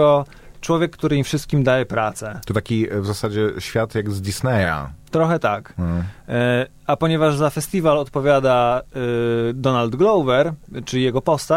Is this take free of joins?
yes; 0 cuts

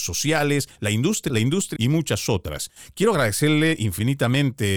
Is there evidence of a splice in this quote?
yes; 2 cuts; at 1.3 s, 1.8 s

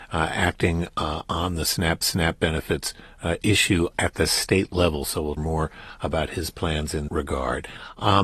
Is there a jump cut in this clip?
yes; 3 cuts; at 2.0 s, 5.4 s, 7.1 s

